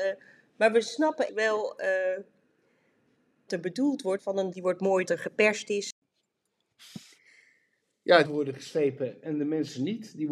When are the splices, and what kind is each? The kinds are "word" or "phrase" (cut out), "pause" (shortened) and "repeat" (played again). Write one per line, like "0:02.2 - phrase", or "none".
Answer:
0:01.3 - word
0:03.5 - word
0:04.2 - word
0:04.5 - word
0:05.0 - word
0:08.2 - word